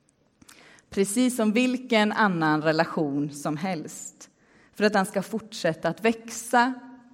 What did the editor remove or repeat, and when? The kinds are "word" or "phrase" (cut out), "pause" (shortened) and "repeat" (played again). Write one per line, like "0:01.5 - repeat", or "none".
none

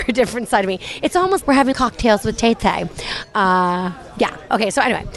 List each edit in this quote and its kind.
0:01.4 - word
0:01.7 - word

